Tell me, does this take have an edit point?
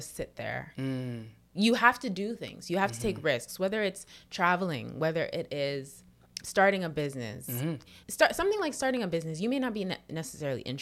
yes; 2 cuts; at 6.4 s, 8.0 s

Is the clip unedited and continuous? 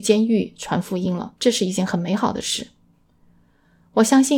no; 1 cut; at 1.4 s

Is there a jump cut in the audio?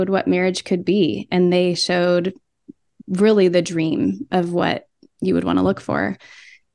no; 0 cuts

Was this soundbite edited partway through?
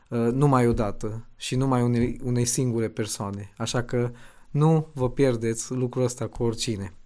no; 0 cuts

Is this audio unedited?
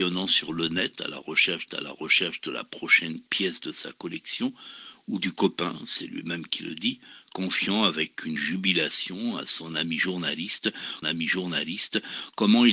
no; 3 cuts; at 1.7 s, 8.4 s, 11.0 s

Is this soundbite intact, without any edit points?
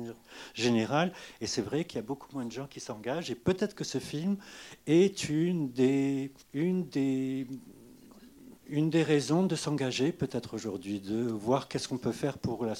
no; 2 cuts; at 6.4 s, 8.6 s

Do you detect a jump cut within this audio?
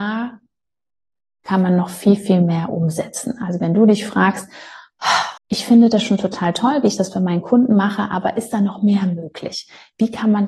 yes; 1 cut; at 5.4 s

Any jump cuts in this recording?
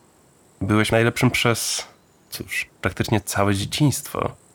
yes; 3 cuts; at 0.9 s, 1.3 s, 2.7 s

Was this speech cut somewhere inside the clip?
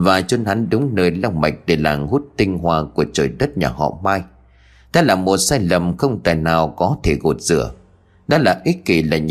no; 0 cuts

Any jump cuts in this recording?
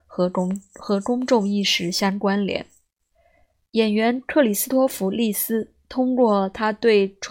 yes; 1 cut; at 3.1 s

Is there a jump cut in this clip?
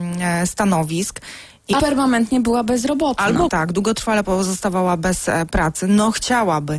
yes; 3 cuts; at 1.8 s, 3.5 s, 4.2 s

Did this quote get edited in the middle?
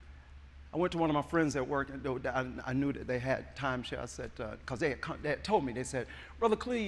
no; 0 cuts

